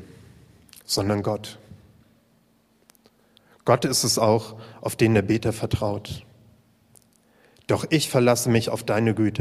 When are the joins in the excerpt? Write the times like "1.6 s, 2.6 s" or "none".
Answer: none